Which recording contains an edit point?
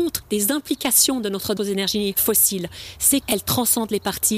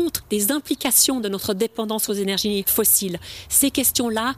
first; 2 cuts; at 1.6 s, 3.2 s

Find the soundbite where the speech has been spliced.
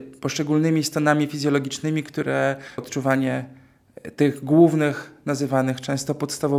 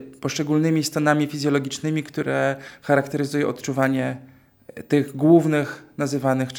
first; 1 cut; at 2.8 s

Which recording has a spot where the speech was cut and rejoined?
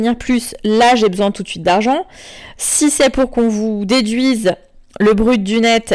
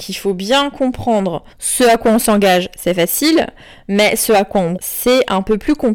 second; 2 cuts; at 1.5 s, 4.8 s

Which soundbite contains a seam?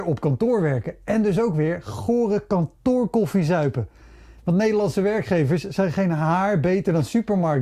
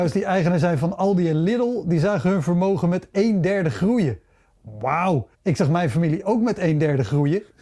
second; 1 cut; at 5.3 s

